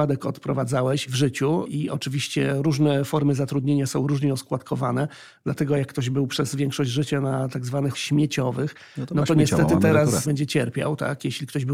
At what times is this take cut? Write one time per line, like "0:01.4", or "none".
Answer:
0:07.9